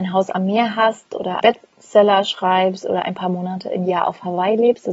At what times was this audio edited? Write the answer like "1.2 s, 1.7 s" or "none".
1.4 s